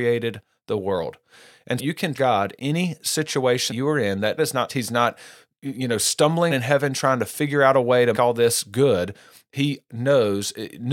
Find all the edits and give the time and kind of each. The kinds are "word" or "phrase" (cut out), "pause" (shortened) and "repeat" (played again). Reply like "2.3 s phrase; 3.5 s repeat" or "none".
1.8 s word; 2.1 s word; 2.6 s word; 3.7 s word; 4.4 s word; 4.7 s word; 6.5 s word; 8.1 s word; 9.9 s word